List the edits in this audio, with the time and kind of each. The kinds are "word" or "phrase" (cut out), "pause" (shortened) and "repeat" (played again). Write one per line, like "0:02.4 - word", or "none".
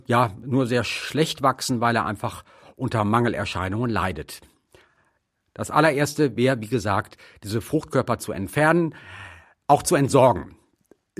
none

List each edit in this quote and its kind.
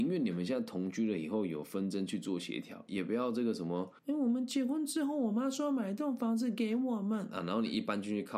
0:04.0 - pause

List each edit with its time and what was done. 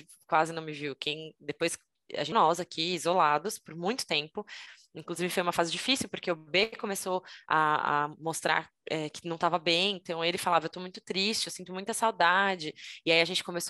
0:02.3 - phrase

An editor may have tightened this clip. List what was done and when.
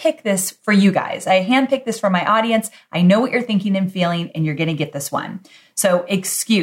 none

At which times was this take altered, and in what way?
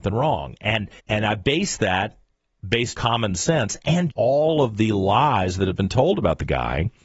0:01.0 - pause
0:02.9 - word
0:04.1 - word

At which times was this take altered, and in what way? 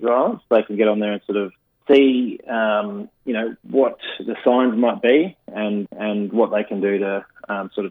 0:01.7 - pause
0:03.1 - pause
0:05.9 - repeat

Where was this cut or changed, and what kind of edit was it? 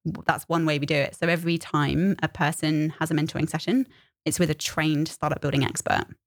none

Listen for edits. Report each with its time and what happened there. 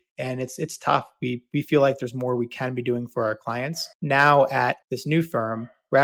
0:03.9 - pause
0:04.8 - pause

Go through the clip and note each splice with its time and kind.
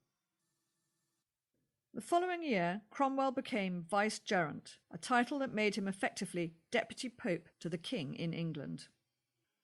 0:04.8 - pause
0:07.5 - pause

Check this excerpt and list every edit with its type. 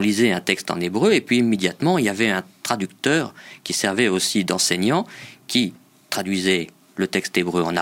none

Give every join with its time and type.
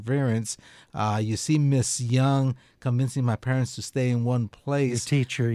none

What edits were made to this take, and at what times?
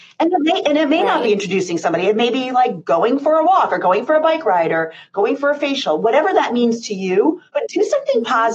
0:07.5 - pause

